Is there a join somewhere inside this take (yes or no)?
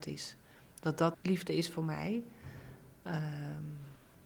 yes